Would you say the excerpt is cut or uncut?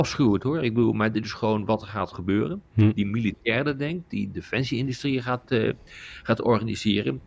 cut